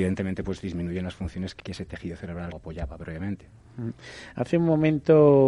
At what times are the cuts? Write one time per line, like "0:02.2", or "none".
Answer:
0:01.6
0:02.5